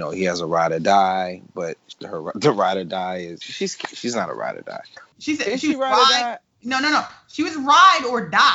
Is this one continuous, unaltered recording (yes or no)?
yes